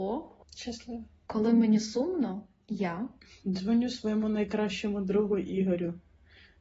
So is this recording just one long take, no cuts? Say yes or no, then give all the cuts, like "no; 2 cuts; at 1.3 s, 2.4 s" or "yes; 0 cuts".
yes; 0 cuts